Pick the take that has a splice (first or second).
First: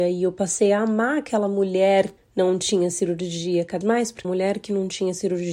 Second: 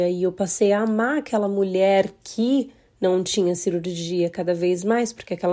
first